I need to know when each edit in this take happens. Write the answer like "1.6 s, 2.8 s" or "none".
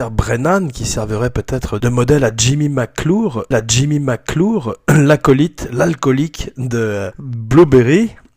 1.8 s, 3.5 s, 7.1 s